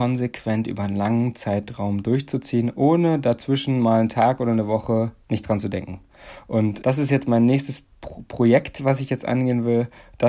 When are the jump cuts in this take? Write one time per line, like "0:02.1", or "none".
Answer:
0:05.2
0:06.8